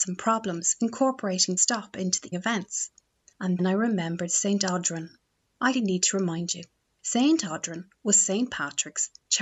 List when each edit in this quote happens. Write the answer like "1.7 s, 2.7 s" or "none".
1.6 s, 2.3 s, 3.6 s, 5.7 s

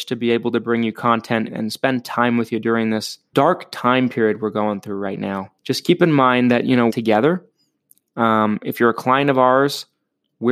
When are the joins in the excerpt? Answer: 1.5 s, 3.3 s, 5.6 s, 6.9 s

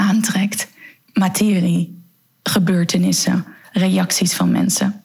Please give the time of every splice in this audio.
3.6 s

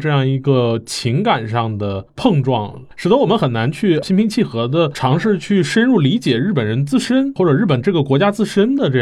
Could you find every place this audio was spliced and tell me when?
2.9 s

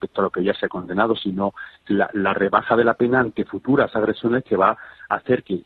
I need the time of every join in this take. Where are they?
none

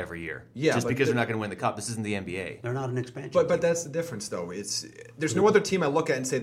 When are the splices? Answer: none

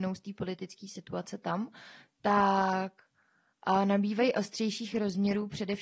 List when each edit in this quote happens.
none

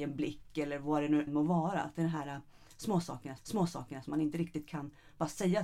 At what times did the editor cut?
1.3 s, 3.4 s

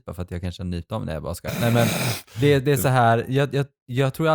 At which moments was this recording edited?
none

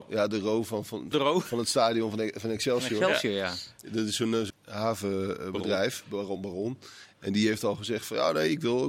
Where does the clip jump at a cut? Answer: 1.1 s, 4.5 s

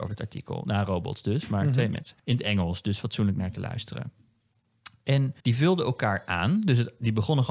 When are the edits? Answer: 2.2 s, 5.4 s

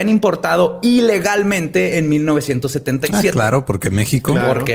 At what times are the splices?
none

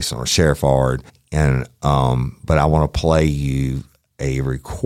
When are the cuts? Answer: 1.1 s

